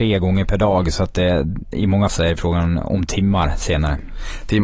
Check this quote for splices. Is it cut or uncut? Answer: cut